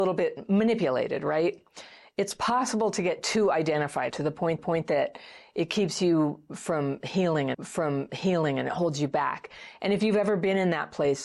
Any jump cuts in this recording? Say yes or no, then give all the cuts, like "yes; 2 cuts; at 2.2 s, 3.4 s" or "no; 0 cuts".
yes; 3 cuts; at 4.1 s, 4.6 s, 7.5 s